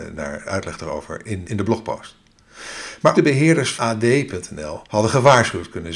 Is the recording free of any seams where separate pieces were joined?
no; 4 cuts; at 1.4 s, 3.1 s, 3.8 s, 4.9 s

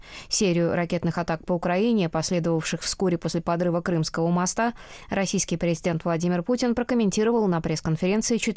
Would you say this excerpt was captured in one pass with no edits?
yes; 0 cuts

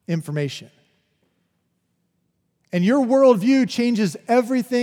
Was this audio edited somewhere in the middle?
no; 0 cuts

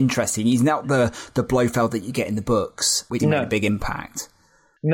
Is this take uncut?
no; 1 cut; at 3.2 s

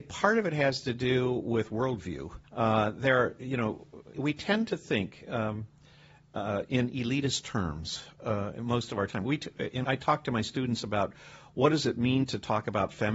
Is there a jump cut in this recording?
yes; 3 cuts; at 2.4 s, 4.1 s, 9.8 s

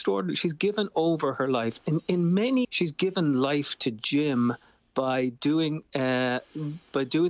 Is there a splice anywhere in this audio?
yes; 1 cut; at 2.6 s

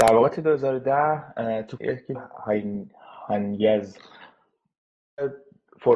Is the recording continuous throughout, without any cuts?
no; 2 cuts; at 1.8 s, 2.1 s

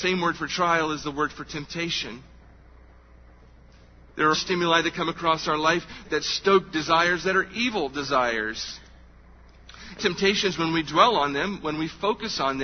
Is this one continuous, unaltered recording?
no; 3 cuts; at 4.3 s, 6.0 s, 10.0 s

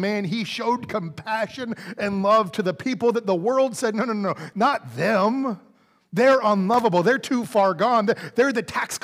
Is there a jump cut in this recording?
no; 0 cuts

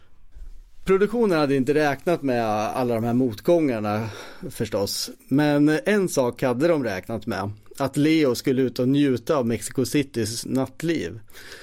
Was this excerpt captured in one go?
yes; 0 cuts

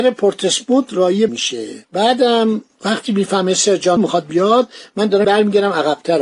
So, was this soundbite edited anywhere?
yes; 5 cuts; at 1.3 s, 1.8 s, 4.0 s, 4.3 s, 5.2 s

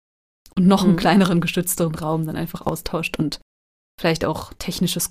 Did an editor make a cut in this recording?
no; 0 cuts

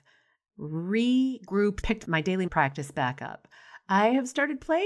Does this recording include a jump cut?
yes; 2 cuts; at 1.8 s, 2.5 s

